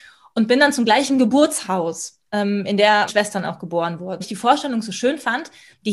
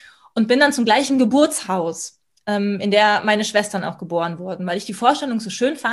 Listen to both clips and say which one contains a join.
first; 3 cuts; at 2.3 s, 3.1 s, 4.2 s

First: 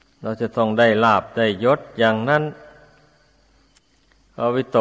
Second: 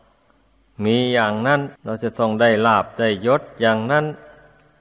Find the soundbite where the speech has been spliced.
second; 1 cut; at 1.7 s

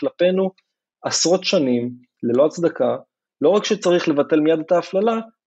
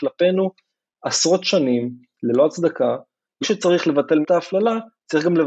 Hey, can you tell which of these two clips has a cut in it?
second; 2 cuts; at 3.4 s, 4.2 s

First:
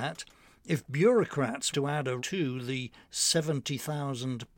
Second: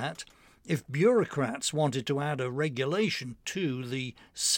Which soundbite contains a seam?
first; 2 cuts; at 1.7 s, 2.2 s

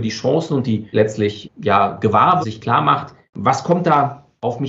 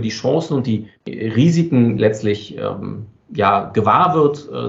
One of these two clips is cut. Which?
first; 3 cuts; at 0.9 s, 1.4 s, 2.4 s

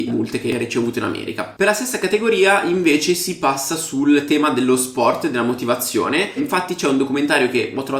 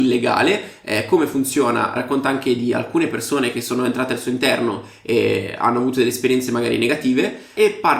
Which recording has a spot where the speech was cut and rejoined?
second; 1 cut; at 2.0 s

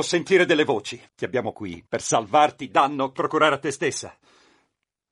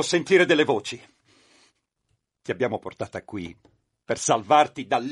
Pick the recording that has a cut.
first; 5 cuts; at 1.1 s, 1.5 s, 1.9 s, 2.7 s, 3.2 s

